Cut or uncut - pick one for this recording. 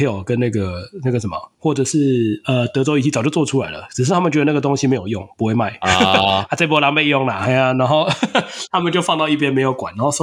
uncut